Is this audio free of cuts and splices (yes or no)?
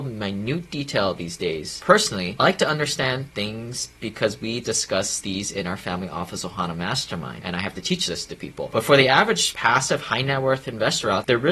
yes